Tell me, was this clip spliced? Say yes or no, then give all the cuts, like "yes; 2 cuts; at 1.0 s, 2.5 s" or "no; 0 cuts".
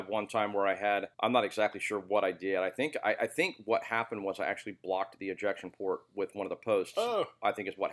yes; 1 cut; at 1.1 s